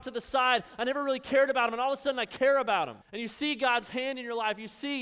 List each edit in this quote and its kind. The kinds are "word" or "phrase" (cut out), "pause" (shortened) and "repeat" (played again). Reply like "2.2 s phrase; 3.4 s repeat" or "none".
3.0 s pause

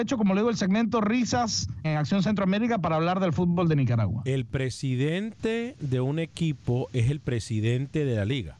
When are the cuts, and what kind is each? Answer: 1.8 s word

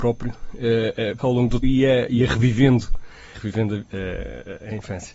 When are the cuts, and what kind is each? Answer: 1.2 s word; 1.6 s word; 3.3 s word

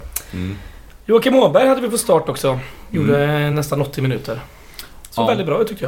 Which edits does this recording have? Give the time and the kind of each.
none

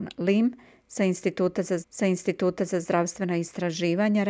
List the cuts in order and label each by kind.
1.8 s repeat

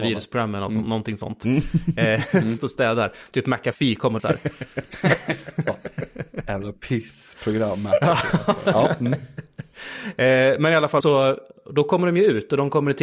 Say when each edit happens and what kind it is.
2.6 s word; 4.2 s phrase; 6.8 s pause; 11.0 s word

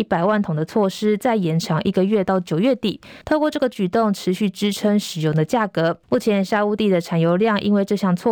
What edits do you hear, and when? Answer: 3.2 s pause; 6.0 s pause

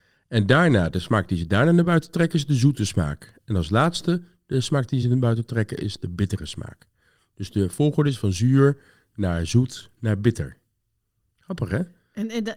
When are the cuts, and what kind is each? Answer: none

